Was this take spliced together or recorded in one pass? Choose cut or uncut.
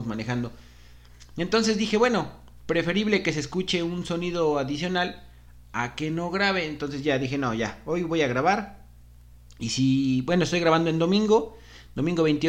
uncut